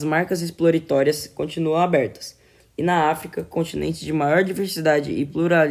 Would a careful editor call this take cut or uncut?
uncut